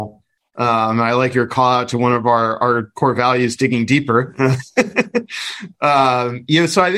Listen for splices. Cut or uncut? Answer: uncut